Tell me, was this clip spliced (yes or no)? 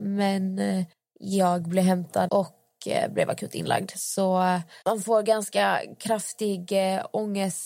yes